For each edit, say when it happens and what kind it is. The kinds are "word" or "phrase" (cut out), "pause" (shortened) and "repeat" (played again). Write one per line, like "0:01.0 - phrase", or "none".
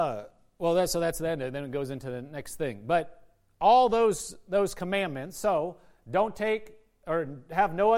none